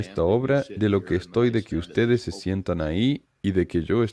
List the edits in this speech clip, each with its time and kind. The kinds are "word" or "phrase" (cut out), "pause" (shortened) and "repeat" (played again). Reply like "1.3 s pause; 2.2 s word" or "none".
none